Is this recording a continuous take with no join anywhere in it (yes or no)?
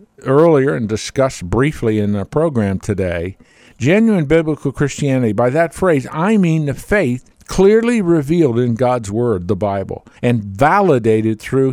no